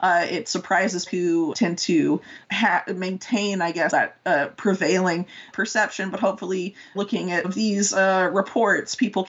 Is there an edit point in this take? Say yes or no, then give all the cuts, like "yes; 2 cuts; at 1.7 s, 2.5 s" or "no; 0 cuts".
yes; 7 cuts; at 1.1 s, 1.5 s, 2.4 s, 3.9 s, 5.5 s, 6.9 s, 7.4 s